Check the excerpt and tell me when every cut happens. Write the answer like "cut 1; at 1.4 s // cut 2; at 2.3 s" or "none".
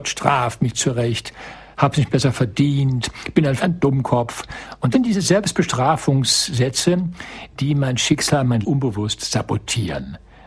cut 1; at 3.6 s // cut 2; at 4.9 s // cut 3; at 8.6 s